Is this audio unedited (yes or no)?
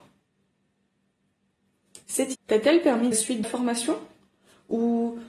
no